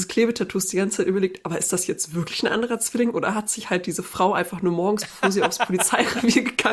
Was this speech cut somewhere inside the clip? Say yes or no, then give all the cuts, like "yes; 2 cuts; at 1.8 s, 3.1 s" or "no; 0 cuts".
no; 0 cuts